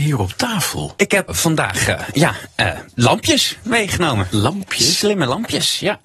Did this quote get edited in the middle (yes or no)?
yes